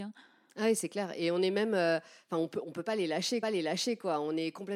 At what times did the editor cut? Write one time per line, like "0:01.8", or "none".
0:03.4